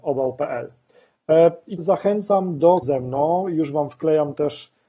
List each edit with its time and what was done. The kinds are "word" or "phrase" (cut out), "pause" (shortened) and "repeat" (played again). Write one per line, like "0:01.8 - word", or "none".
0:01.8 - word
0:02.8 - word